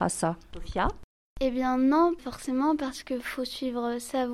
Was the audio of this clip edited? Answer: yes; 1 cut; at 2.2 s

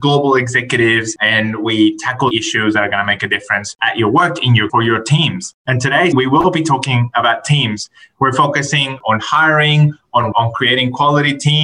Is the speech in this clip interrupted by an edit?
yes; 4 cuts; at 2.3 s, 4.7 s, 6.1 s, 10.3 s

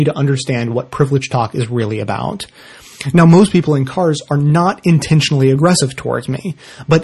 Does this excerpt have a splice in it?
no; 0 cuts

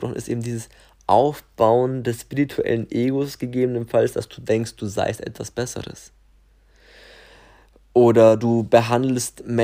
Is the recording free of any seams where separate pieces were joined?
yes; 0 cuts

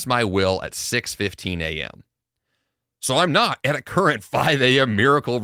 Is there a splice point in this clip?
no; 0 cuts

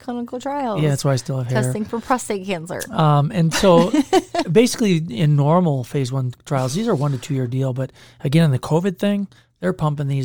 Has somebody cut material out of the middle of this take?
no; 0 cuts

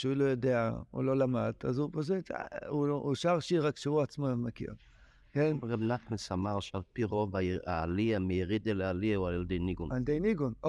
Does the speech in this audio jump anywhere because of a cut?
no; 0 cuts

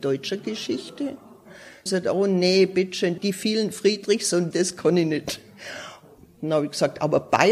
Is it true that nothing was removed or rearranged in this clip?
no; 3 cuts; at 1.9 s, 3.2 s, 4.5 s

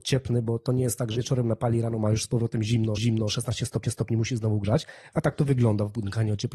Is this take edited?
yes; 3 cuts; at 1.2 s, 3.0 s, 3.8 s

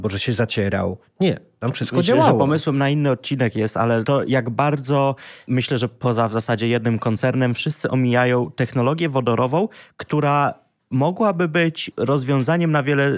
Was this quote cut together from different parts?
no; 0 cuts

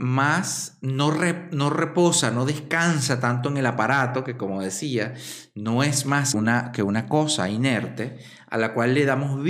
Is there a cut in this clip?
yes; 1 cut; at 6.3 s

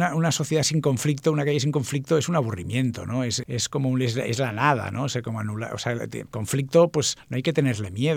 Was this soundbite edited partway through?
no; 0 cuts

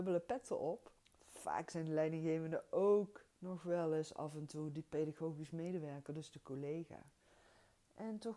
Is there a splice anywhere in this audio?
yes; 2 cuts; at 1.0 s, 3.3 s

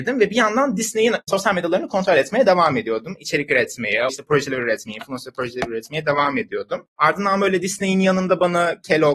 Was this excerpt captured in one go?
no; 1 cut; at 4.1 s

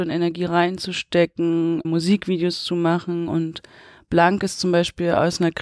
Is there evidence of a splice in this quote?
yes; 1 cut; at 1.8 s

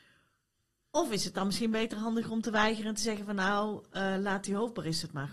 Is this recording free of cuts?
yes; 0 cuts

